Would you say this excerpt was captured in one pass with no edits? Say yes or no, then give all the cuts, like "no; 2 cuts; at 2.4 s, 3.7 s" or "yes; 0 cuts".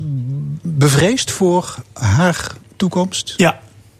yes; 0 cuts